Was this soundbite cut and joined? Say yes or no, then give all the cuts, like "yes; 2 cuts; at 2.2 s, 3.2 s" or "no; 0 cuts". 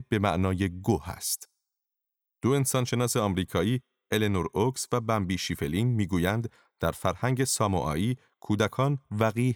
no; 0 cuts